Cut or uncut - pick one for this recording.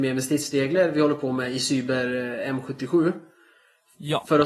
uncut